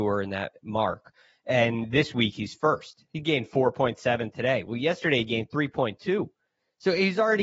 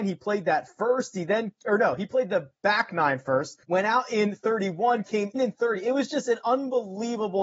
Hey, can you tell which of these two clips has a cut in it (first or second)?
second